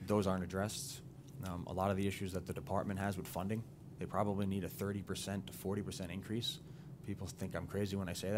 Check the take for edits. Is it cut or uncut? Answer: uncut